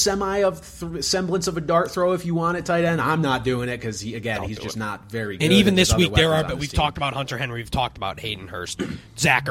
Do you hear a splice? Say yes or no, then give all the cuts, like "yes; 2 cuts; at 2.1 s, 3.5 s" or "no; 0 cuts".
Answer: no; 0 cuts